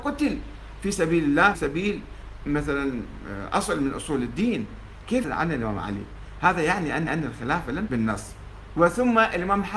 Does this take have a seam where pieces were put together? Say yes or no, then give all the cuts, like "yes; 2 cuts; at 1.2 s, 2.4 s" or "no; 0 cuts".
yes; 4 cuts; at 1.5 s, 5.2 s, 7.1 s, 7.9 s